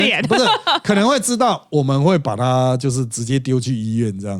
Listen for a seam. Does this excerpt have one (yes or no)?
no